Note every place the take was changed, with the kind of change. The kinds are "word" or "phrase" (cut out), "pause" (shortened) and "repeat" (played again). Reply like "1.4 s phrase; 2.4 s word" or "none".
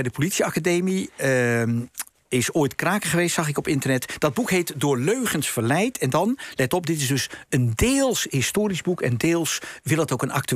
7.5 s pause